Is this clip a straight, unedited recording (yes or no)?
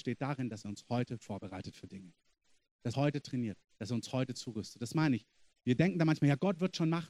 no